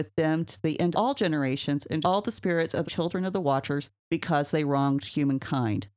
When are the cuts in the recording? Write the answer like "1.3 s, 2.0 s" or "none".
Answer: 0.9 s, 2.0 s, 2.9 s, 4.0 s